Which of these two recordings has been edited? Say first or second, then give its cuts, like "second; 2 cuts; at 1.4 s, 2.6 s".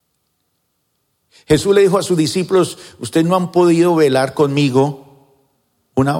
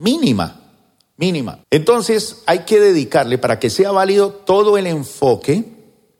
second; 1 cut; at 1.6 s